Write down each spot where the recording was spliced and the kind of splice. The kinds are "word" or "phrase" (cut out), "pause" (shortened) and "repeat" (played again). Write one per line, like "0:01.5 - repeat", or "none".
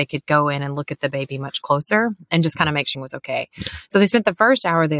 0:02.9 - word